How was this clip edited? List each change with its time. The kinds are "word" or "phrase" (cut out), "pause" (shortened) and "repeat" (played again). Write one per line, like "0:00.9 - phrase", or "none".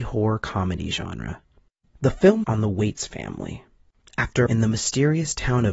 0:02.4 - word
0:04.5 - word